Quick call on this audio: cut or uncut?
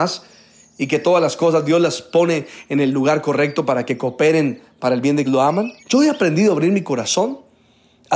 cut